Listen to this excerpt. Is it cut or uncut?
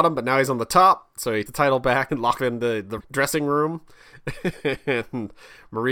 cut